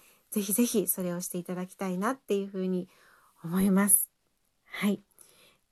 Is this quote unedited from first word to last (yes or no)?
yes